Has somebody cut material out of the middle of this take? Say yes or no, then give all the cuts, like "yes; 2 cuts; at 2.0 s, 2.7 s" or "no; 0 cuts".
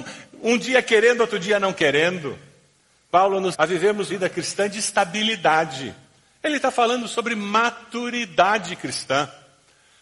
yes; 2 cuts; at 3.5 s, 4.1 s